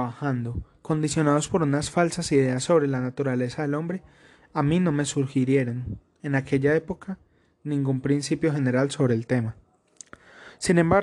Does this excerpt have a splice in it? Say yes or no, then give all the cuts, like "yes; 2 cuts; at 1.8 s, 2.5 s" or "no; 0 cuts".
no; 0 cuts